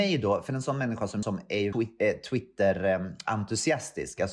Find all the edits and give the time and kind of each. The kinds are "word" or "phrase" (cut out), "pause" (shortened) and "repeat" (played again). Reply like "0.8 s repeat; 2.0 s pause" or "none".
1.2 s word; 1.7 s word